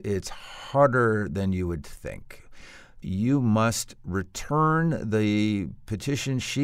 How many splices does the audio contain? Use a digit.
0